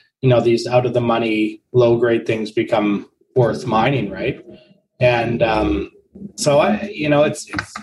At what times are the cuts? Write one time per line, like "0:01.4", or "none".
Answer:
none